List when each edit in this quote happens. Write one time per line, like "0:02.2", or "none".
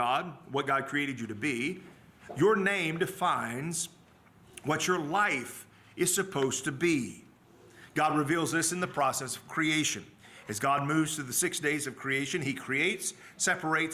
none